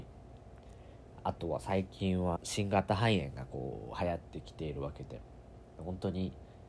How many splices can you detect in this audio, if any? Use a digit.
1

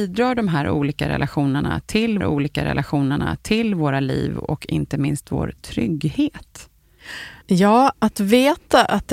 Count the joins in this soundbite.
2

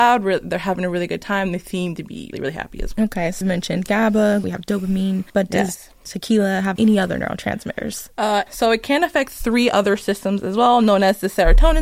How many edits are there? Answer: 7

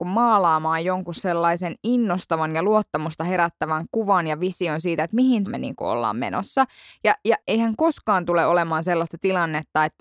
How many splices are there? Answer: 2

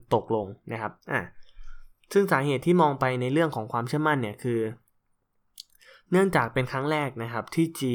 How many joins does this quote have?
1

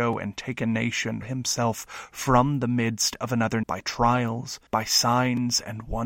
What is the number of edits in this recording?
3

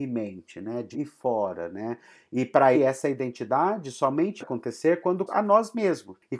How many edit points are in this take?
4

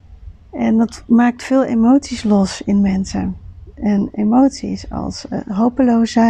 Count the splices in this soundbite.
0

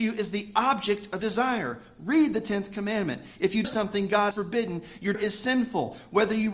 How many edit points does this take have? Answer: 4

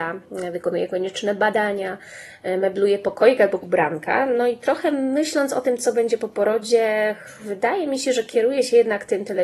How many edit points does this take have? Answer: 1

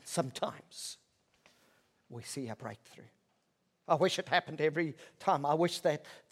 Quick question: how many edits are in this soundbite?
0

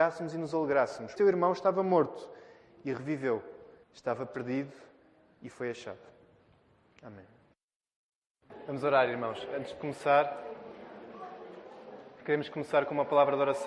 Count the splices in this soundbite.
2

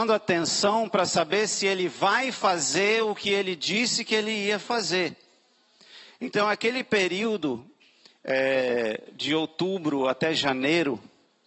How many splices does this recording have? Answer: 0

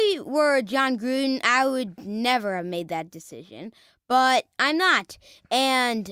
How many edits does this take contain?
0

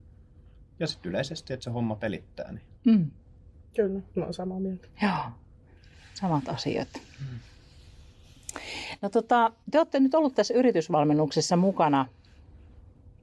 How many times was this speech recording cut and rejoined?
4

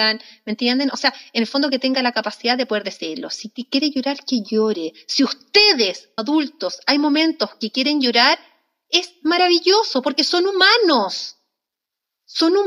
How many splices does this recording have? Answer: 1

